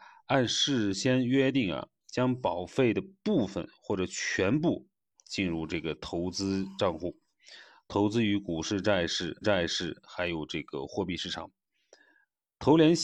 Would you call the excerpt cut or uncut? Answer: cut